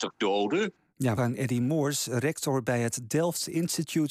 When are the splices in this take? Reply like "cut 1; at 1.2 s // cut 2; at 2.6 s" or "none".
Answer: cut 1; at 1.2 s